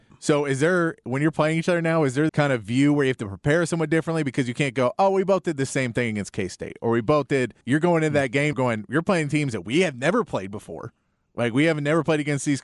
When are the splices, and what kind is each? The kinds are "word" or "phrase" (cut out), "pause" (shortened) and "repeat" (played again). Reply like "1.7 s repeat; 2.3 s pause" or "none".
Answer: 2.3 s phrase; 7.6 s pause; 8.5 s word